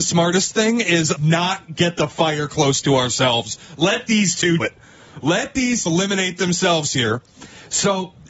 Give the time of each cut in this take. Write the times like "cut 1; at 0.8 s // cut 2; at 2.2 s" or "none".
cut 1; at 1.2 s // cut 2; at 4.6 s // cut 3; at 5.9 s